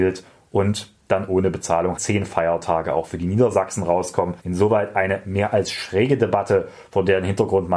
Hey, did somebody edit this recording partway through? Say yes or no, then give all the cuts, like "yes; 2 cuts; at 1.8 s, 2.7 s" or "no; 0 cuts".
yes; 2 cuts; at 2.0 s, 4.4 s